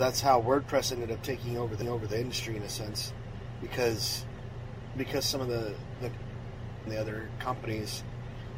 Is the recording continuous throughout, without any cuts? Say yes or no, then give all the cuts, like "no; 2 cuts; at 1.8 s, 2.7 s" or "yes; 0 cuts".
no; 3 cuts; at 1.8 s, 5.0 s, 6.9 s